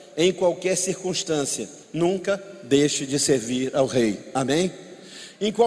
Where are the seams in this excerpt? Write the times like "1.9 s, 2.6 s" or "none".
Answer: 1.8 s